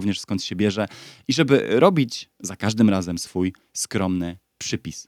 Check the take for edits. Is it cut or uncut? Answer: uncut